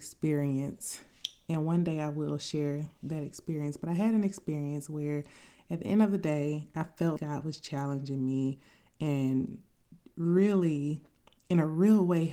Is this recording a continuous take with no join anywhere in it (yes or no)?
no